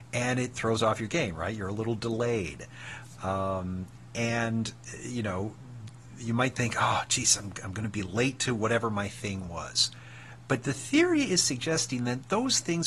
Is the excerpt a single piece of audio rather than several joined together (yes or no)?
yes